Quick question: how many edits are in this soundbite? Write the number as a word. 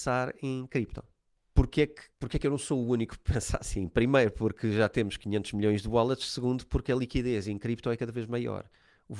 two